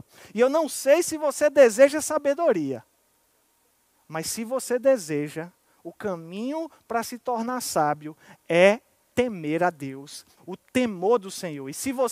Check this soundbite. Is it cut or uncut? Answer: cut